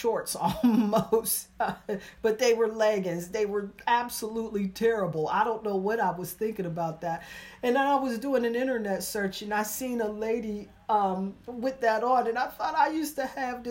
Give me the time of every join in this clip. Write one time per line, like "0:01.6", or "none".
none